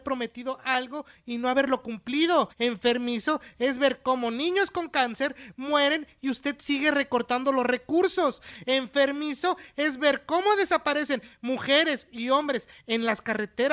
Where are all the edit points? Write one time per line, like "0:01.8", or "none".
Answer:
0:02.5